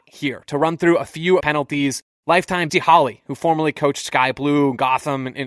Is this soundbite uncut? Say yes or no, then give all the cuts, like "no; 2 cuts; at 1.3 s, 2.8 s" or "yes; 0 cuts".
no; 2 cuts; at 1.4 s, 2.7 s